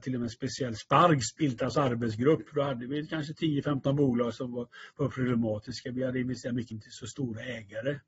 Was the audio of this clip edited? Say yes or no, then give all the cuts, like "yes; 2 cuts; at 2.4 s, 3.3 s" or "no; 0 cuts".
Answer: yes; 1 cut; at 6.7 s